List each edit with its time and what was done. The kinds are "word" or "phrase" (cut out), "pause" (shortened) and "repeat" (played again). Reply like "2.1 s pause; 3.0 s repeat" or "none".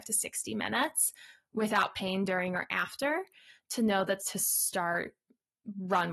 4.2 s phrase